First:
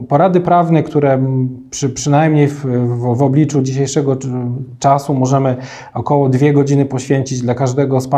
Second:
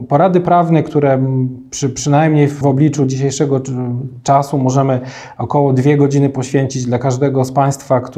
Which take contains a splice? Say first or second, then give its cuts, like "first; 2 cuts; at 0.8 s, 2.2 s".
second; 1 cut; at 2.6 s